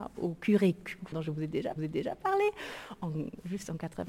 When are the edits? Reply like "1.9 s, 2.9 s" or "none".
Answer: 1.1 s, 1.8 s